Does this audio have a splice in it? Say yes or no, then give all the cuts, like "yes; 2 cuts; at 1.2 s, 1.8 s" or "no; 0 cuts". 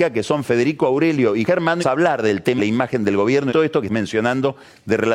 yes; 5 cuts; at 1.4 s, 1.8 s, 2.6 s, 3.5 s, 3.9 s